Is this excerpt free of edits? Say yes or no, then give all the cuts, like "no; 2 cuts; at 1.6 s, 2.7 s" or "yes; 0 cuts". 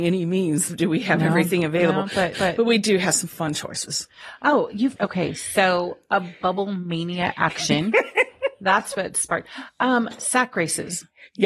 no; 2 cuts; at 2.3 s, 5.0 s